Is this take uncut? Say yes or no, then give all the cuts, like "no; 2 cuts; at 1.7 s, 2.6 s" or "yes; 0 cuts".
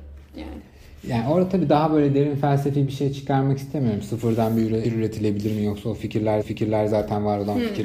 no; 2 cuts; at 4.8 s, 6.4 s